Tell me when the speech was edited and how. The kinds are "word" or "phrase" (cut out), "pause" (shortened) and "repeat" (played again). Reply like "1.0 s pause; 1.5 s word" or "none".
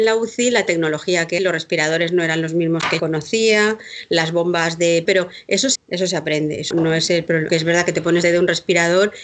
1.4 s word; 3.0 s word; 5.1 s word; 5.8 s word; 6.7 s word; 7.5 s word; 8.2 s word

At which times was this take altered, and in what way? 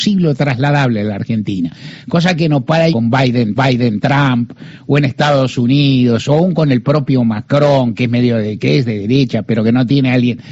2.9 s phrase; 3.6 s repeat

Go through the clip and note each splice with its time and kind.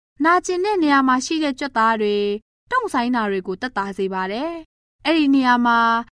none

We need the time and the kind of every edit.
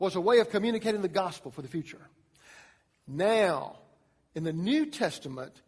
none

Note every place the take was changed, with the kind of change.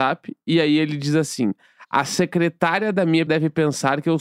3.3 s word

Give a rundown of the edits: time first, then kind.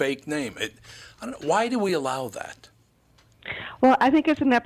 none

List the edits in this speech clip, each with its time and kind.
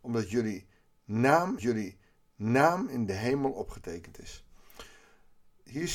1.6 s repeat

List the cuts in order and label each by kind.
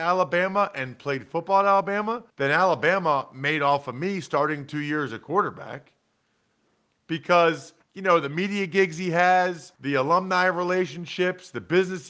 2.3 s pause; 7.8 s pause; 9.8 s pause

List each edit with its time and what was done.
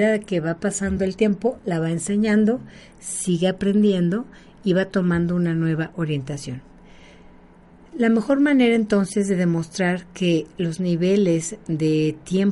none

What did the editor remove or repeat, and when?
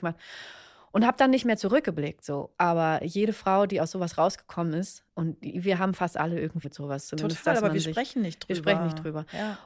5.1 s pause; 6.6 s word

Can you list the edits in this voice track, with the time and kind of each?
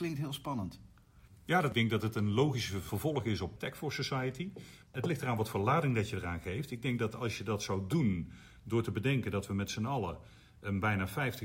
none

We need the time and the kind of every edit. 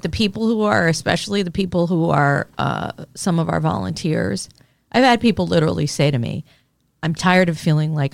none

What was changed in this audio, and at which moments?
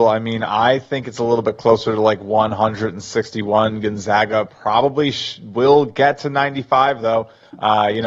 none

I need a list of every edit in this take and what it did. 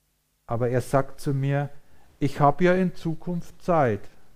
none

